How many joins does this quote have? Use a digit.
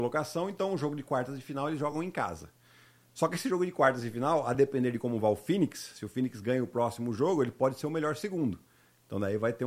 0